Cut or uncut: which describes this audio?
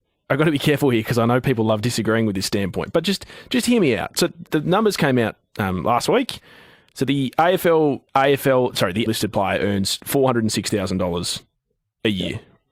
cut